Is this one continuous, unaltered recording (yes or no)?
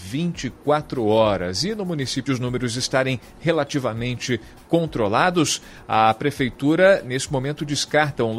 no